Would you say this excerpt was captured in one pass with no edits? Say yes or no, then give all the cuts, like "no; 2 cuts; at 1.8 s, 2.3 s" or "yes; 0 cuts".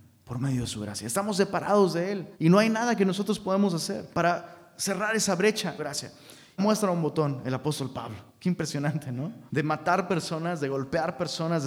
no; 6 cuts; at 2.3 s, 4.1 s, 5.8 s, 6.6 s, 8.3 s, 9.5 s